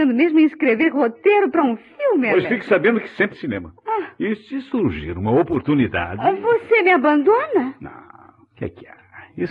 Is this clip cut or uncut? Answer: cut